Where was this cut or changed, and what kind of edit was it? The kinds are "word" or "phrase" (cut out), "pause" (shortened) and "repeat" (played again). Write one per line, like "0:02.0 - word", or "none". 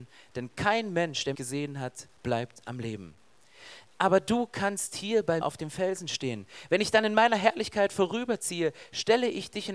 0:01.3 - word
0:05.4 - word

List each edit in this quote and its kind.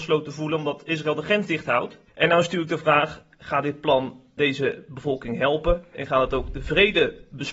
0:02.1 - pause
0:04.4 - word

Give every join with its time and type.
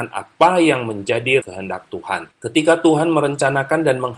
0:01.4 - phrase
0:02.3 - pause

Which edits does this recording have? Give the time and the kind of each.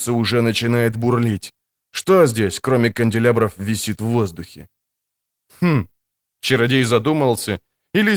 none

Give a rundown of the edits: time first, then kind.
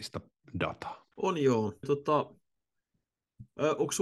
0:01.1 - pause
0:01.8 - word

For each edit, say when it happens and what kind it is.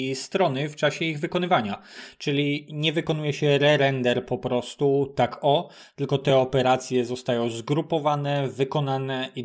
none

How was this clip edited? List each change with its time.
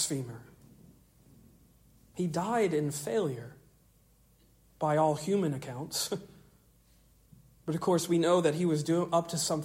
none

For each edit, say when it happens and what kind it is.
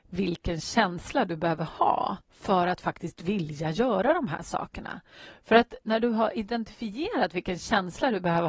0:02.2 - pause

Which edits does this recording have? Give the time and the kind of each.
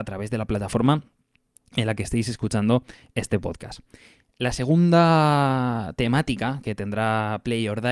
none

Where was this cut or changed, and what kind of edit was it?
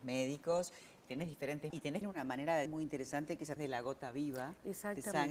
0:01.7 - word
0:02.0 - word
0:02.7 - word
0:03.6 - word

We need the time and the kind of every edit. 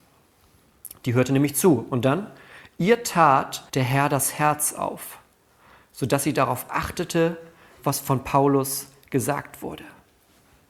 0:03.7 - pause

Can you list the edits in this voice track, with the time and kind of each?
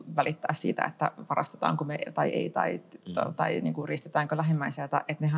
none

